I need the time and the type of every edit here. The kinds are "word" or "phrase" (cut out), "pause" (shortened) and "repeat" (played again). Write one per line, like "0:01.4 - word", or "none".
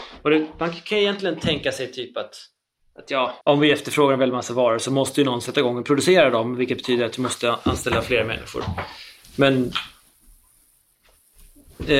0:03.4 - pause